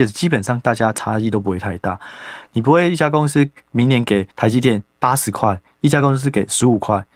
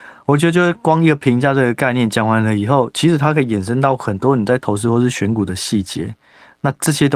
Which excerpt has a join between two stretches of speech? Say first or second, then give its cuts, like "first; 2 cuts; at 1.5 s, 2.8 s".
first; 2 cuts; at 4.3 s, 4.9 s